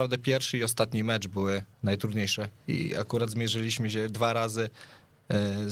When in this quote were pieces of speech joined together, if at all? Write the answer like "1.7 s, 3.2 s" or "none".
1.7 s